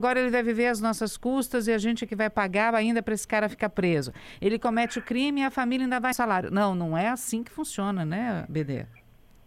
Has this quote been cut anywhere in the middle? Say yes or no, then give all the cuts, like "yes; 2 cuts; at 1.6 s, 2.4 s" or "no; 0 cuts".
yes; 1 cut; at 6.1 s